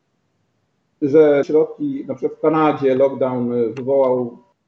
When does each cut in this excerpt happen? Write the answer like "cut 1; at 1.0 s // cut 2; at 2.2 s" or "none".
cut 1; at 1.4 s